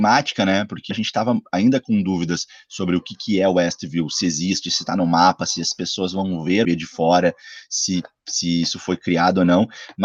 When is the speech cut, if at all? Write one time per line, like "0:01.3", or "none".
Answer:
0:00.9
0:06.6